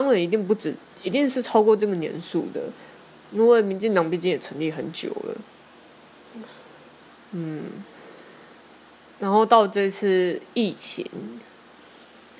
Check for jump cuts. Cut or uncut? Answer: cut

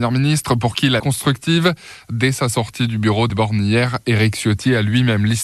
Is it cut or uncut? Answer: cut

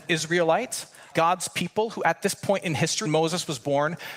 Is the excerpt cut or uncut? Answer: cut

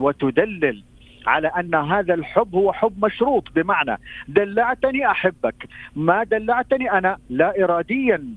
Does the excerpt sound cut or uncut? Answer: uncut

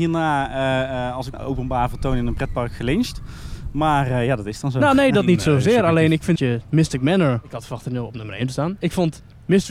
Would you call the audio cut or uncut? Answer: cut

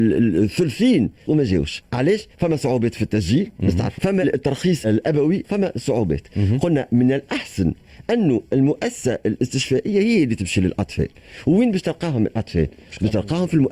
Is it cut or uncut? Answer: cut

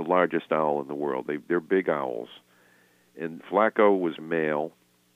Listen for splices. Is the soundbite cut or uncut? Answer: cut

